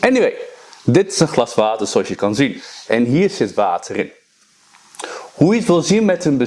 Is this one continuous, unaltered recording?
yes; 0 cuts

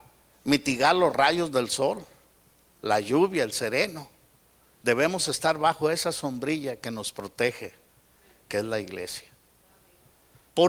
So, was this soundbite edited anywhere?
no; 0 cuts

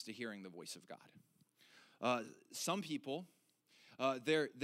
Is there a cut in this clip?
no; 0 cuts

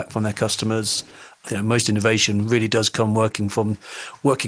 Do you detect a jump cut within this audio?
no; 0 cuts

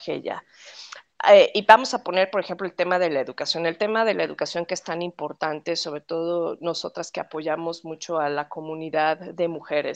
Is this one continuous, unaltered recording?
yes; 0 cuts

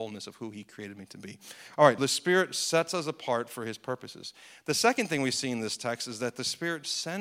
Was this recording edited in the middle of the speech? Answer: yes; 1 cut; at 2.0 s

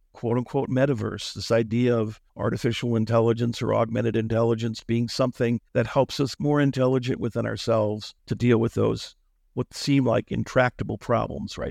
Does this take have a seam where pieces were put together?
yes; 4 cuts; at 2.3 s, 5.7 s, 6.4 s, 8.2 s

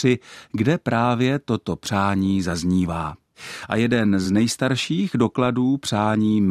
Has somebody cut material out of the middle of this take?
no; 0 cuts

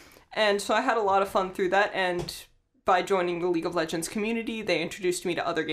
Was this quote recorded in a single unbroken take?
yes; 0 cuts

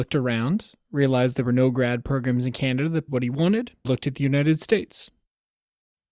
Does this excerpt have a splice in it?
yes; 2 cuts; at 3.1 s, 3.8 s

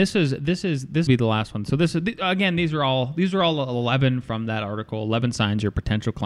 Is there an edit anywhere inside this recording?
yes; 1 cut; at 1.1 s

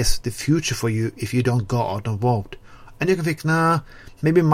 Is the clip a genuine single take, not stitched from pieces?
yes; 0 cuts

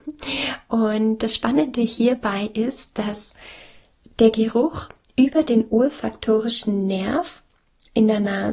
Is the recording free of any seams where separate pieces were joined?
yes; 0 cuts

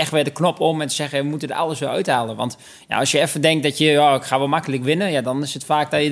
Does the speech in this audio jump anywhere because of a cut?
no; 0 cuts

